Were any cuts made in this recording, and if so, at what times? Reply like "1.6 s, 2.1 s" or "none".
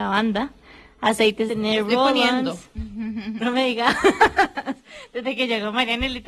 1.5 s, 3.4 s

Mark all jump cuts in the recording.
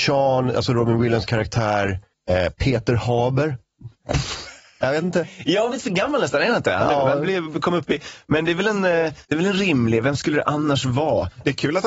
2.1 s, 5.7 s, 9.2 s

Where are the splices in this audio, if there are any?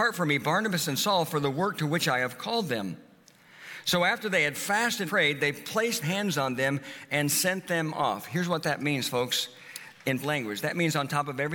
5.1 s, 6.0 s, 10.2 s

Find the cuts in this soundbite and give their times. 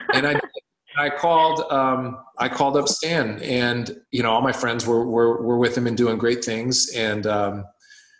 4.1 s

